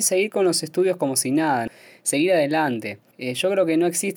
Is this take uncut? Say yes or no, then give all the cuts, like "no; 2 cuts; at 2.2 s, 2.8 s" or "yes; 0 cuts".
yes; 0 cuts